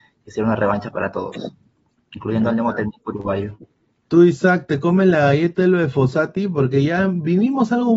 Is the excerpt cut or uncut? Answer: uncut